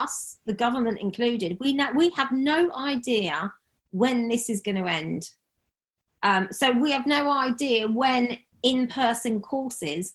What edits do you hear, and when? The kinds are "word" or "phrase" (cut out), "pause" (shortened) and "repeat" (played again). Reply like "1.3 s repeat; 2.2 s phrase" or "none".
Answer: 8.5 s pause